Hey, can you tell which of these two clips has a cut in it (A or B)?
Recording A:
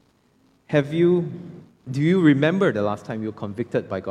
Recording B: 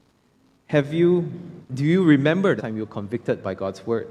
B